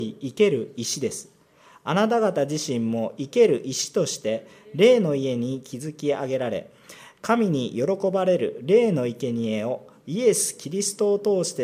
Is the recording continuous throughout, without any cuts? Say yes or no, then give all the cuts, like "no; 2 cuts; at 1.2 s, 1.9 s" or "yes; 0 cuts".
yes; 0 cuts